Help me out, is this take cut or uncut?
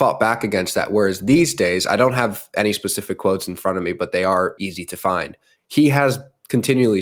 cut